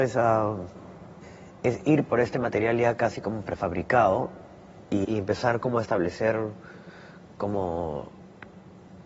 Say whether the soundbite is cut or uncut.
cut